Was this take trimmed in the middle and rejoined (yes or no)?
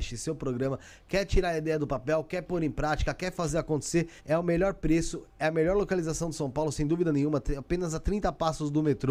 yes